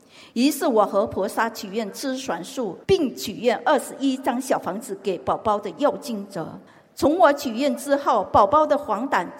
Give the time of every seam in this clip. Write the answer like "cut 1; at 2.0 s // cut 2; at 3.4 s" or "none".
cut 1; at 2.8 s // cut 2; at 6.7 s